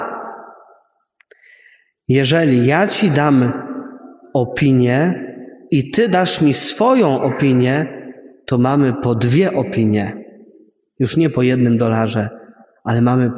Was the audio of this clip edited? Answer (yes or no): no